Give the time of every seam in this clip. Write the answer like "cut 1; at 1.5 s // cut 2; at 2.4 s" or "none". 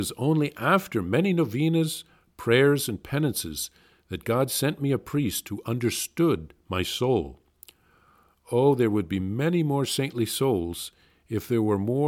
none